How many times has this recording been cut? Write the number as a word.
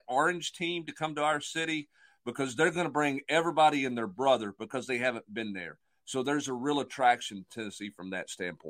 zero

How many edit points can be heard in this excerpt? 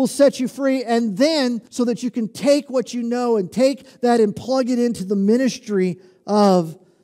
one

